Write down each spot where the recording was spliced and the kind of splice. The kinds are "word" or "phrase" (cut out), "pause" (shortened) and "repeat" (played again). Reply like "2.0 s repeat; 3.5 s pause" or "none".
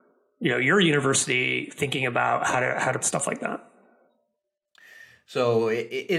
3.0 s word